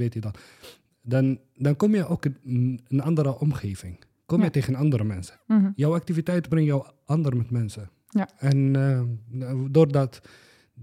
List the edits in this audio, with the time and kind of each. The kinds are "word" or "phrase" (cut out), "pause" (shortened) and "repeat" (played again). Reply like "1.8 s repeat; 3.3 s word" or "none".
none